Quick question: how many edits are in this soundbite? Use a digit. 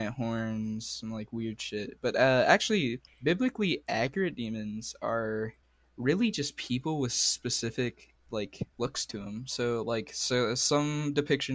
3